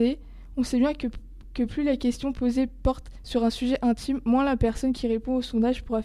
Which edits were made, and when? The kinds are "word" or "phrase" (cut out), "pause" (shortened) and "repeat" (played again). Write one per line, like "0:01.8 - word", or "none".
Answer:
none